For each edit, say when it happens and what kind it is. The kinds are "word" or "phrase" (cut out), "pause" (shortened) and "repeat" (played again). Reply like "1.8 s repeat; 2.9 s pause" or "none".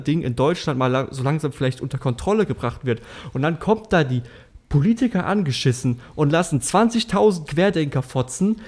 7.5 s word